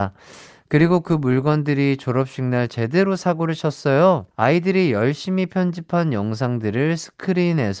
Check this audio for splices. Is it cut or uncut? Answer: cut